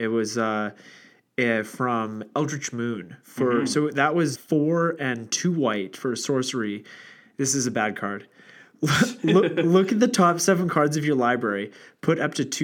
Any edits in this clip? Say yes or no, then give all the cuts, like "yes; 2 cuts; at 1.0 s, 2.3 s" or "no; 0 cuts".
yes; 1 cut; at 4.3 s